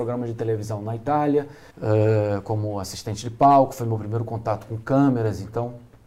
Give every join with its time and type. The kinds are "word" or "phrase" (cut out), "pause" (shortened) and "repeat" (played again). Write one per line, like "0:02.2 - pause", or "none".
0:01.7 - pause